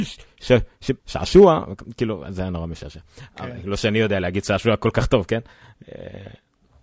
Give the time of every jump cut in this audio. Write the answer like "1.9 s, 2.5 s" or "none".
1.0 s